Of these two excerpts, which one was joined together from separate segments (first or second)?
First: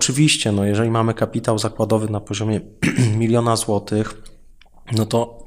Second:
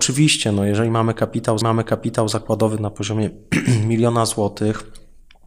second